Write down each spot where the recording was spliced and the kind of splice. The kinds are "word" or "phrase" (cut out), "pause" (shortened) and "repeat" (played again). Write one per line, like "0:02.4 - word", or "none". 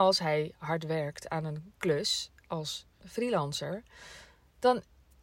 0:03.0 - word